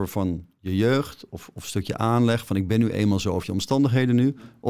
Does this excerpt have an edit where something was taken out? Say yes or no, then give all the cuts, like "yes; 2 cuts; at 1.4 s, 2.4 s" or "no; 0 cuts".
no; 0 cuts